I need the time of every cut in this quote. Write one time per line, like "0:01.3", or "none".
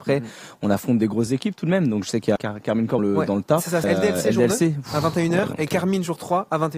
0:02.4
0:03.0
0:03.8